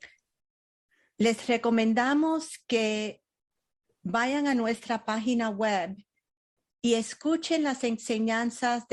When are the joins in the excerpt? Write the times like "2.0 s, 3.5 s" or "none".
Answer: none